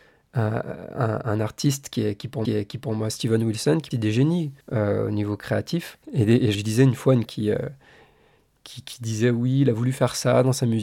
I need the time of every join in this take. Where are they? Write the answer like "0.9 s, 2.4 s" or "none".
1.2 s, 2.4 s, 3.9 s, 4.6 s, 6.0 s, 6.5 s, 7.3 s